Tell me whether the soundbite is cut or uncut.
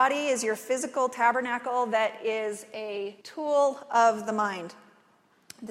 cut